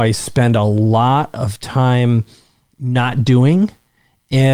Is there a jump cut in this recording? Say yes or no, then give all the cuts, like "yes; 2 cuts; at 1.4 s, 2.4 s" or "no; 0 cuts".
no; 0 cuts